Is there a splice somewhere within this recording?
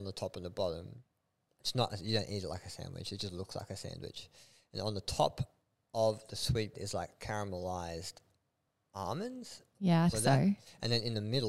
yes; 2 cuts; at 6.7 s, 10.1 s

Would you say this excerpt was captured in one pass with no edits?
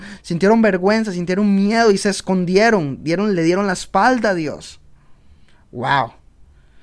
yes; 0 cuts

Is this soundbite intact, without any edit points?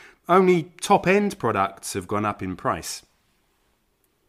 yes; 0 cuts

